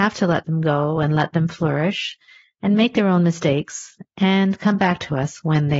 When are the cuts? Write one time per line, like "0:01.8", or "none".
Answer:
none